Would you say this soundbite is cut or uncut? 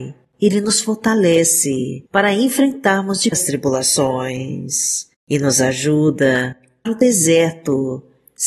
cut